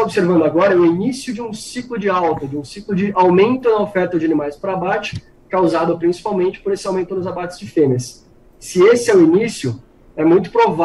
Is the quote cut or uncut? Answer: uncut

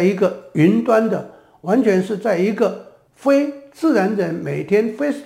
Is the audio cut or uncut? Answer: uncut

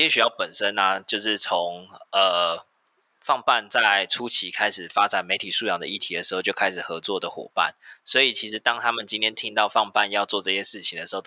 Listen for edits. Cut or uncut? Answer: uncut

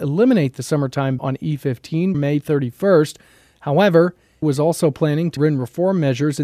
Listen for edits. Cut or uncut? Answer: cut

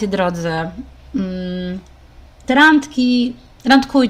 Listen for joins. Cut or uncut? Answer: uncut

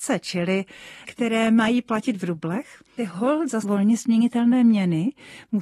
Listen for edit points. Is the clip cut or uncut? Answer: cut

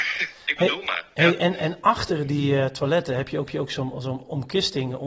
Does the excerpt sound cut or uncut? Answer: cut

